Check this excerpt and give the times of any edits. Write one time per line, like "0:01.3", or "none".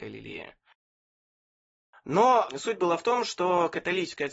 none